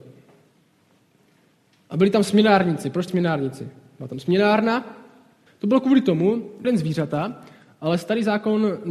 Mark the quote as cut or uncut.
cut